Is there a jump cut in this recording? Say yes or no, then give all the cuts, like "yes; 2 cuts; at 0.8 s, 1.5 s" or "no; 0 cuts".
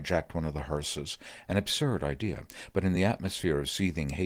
no; 0 cuts